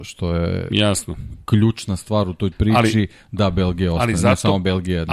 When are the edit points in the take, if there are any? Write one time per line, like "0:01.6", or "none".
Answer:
0:02.5